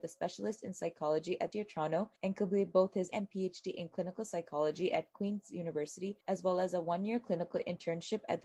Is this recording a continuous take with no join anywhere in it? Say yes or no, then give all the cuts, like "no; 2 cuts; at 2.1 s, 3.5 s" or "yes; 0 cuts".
no; 4 cuts; at 1.5 s, 2.2 s, 3.1 s, 6.2 s